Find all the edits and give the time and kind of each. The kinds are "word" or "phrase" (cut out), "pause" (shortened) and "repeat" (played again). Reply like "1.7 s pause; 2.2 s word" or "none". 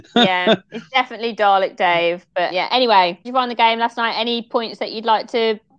2.5 s word; 3.2 s phrase